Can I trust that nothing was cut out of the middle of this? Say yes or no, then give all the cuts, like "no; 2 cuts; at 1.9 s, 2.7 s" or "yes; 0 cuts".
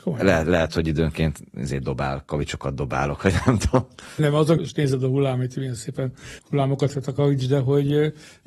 no; 3 cuts; at 4.2 s, 4.6 s, 6.4 s